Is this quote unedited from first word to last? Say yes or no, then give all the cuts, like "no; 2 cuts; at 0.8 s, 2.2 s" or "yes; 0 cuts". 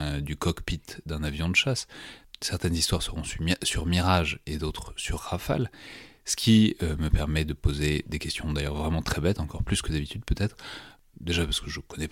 yes; 0 cuts